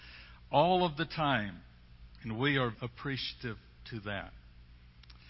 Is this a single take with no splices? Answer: no; 2 cuts; at 2.1 s, 2.7 s

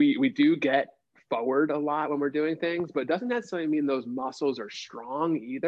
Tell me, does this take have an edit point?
no; 0 cuts

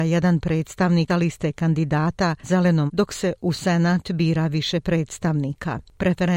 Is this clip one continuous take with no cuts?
no; 3 cuts; at 1.1 s, 2.4 s, 2.9 s

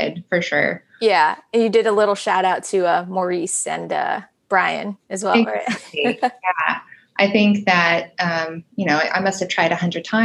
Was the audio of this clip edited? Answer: no; 0 cuts

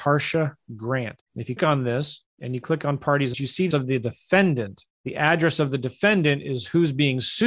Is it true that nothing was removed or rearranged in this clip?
no; 3 cuts; at 1.6 s, 3.3 s, 3.7 s

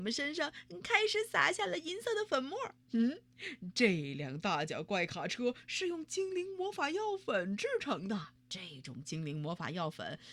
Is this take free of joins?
no; 2 cuts; at 2.8 s, 8.4 s

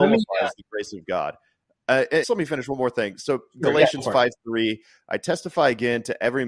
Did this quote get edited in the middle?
yes; 1 cut; at 2.2 s

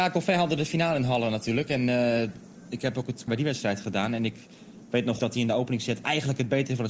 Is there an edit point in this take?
yes; 2 cuts; at 3.3 s, 5.2 s

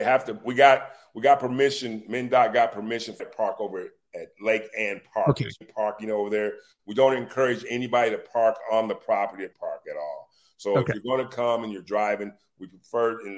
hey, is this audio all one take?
no; 3 cuts; at 3.2 s, 5.6 s, 9.5 s

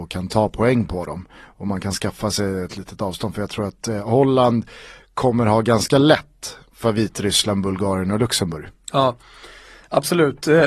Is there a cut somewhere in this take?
no; 0 cuts

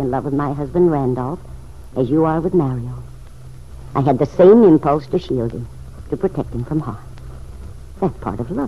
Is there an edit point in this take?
no; 0 cuts

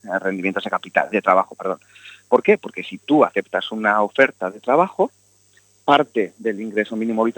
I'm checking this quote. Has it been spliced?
yes; 1 cut; at 1.1 s

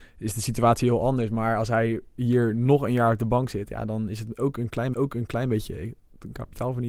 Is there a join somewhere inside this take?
yes; 1 cut; at 4.9 s

